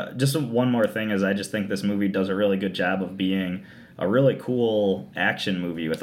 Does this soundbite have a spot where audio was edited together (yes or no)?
no